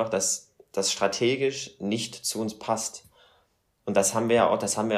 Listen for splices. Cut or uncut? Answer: uncut